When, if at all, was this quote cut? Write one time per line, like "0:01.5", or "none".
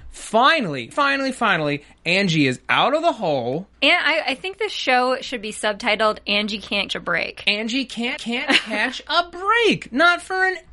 0:00.9
0:03.7
0:06.9
0:08.2